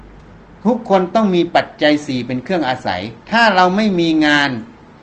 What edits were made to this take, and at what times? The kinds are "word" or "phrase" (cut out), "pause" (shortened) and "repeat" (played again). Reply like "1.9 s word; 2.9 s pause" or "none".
3.2 s pause